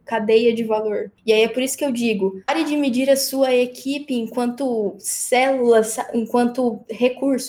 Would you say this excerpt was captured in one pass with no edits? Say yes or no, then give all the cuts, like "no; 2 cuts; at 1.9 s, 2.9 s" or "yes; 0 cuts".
no; 2 cuts; at 1.2 s, 2.4 s